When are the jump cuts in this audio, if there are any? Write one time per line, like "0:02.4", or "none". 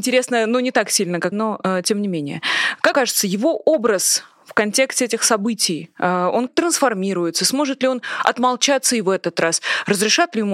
0:01.3
0:02.9
0:06.5

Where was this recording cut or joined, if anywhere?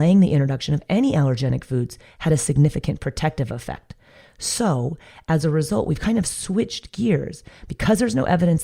none

